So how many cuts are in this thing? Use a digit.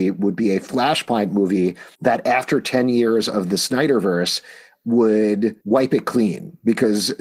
2